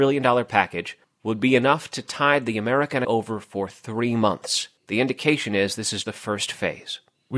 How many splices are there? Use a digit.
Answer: 4